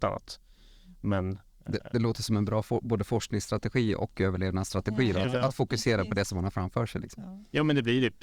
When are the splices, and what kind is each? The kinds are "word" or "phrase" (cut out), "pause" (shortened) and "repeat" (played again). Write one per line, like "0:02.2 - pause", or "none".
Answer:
none